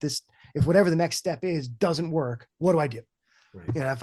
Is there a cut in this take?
yes; 1 cut; at 2.5 s

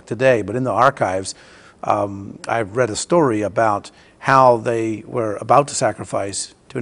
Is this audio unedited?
yes; 0 cuts

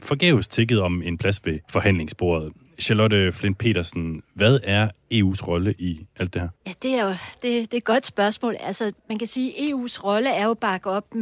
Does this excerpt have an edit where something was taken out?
yes; 3 cuts; at 1.6 s, 6.6 s, 9.0 s

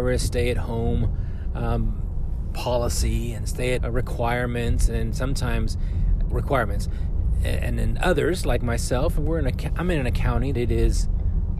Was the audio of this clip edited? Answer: yes; 3 cuts; at 3.8 s, 6.3 s, 10.5 s

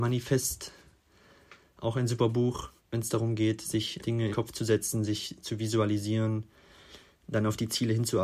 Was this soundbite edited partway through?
yes; 3 cuts; at 2.8 s, 4.0 s, 4.3 s

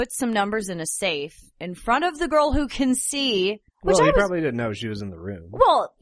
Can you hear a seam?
no; 0 cuts

